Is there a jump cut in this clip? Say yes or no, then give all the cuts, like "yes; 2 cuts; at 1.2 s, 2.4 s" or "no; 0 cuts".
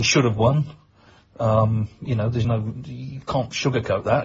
no; 0 cuts